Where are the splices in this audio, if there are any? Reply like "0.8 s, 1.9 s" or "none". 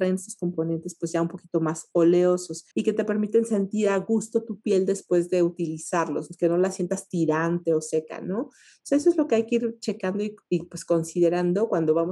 2.7 s